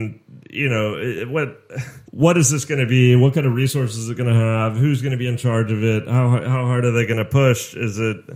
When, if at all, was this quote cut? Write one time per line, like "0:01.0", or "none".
0:02.1